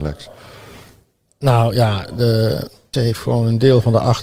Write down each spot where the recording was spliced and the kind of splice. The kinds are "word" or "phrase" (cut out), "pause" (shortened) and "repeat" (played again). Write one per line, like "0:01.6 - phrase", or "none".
0:02.9 - word